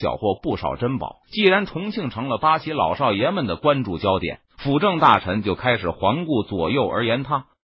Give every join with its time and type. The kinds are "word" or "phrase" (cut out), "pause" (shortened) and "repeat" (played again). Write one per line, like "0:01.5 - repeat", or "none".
0:01.2 - pause
0:04.5 - pause